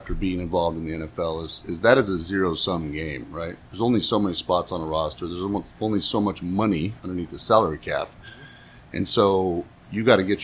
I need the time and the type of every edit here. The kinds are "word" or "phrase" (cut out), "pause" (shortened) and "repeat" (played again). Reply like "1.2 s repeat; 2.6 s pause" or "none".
none